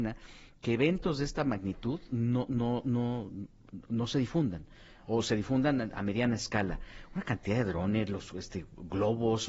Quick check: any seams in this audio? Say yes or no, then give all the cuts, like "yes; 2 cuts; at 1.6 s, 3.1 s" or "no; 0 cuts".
no; 0 cuts